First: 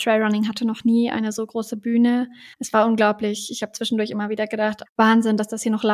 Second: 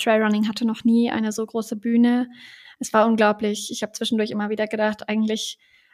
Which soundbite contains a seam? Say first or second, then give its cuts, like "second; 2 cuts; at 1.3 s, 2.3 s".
first; 2 cuts; at 2.5 s, 4.9 s